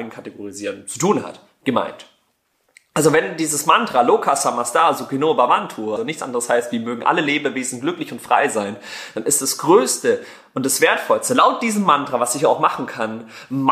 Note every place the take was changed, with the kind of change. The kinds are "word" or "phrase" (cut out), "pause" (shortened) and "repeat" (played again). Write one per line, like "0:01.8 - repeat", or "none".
0:06.0 - word